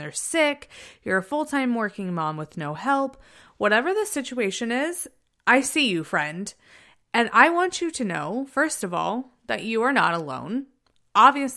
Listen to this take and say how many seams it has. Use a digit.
0